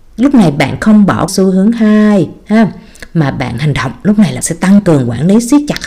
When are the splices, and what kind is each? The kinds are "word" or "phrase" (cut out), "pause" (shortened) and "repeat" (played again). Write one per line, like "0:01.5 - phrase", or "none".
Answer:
0:01.3 - word
0:04.4 - word